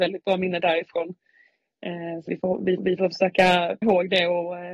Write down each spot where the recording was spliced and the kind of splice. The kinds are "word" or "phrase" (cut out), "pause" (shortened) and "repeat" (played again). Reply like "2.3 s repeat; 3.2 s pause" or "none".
2.3 s word; 2.8 s repeat; 3.8 s word